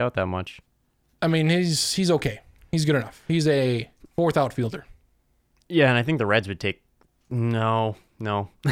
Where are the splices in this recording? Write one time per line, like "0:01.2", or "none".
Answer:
none